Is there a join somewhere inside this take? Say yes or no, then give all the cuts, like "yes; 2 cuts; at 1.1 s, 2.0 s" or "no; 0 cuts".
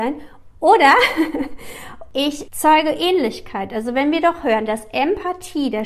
no; 0 cuts